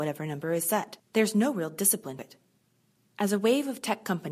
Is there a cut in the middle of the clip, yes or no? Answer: yes